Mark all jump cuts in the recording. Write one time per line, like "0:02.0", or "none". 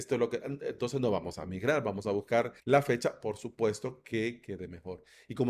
0:02.6